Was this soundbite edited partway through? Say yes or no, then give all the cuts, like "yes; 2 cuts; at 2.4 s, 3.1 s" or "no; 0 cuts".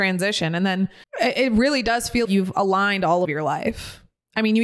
yes; 3 cuts; at 1.0 s, 2.2 s, 3.2 s